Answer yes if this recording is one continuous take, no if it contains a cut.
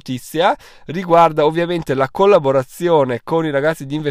yes